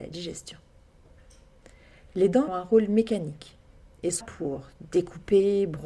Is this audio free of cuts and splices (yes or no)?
no